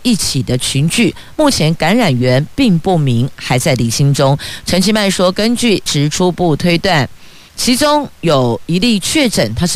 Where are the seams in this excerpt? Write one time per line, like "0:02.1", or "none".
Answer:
0:05.9